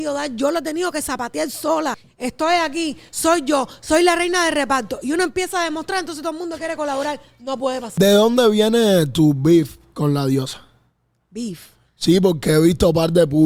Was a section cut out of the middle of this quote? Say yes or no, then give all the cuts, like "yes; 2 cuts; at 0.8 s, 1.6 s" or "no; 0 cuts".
no; 0 cuts